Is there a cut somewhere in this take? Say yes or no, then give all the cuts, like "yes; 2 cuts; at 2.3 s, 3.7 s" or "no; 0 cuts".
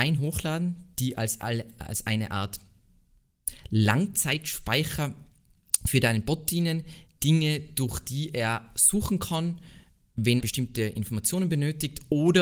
yes; 1 cut; at 10.4 s